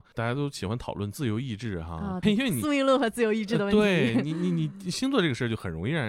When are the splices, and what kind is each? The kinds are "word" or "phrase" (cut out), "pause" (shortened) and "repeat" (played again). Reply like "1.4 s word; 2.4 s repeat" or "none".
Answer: 2.2 s word